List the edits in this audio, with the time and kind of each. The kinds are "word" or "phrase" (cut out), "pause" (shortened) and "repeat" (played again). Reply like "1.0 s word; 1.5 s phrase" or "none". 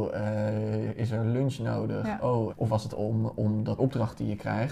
2.5 s word; 2.9 s word; 3.8 s word